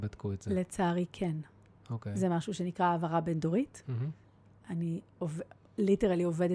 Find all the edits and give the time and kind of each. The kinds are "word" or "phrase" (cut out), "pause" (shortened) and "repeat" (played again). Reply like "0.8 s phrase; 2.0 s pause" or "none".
none